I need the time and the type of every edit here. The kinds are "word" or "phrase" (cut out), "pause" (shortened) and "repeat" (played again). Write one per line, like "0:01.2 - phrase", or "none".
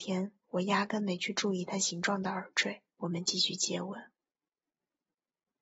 0:02.9 - pause